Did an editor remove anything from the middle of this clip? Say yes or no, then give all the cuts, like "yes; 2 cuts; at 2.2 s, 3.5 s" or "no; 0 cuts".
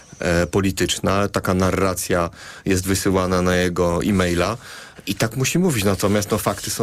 no; 0 cuts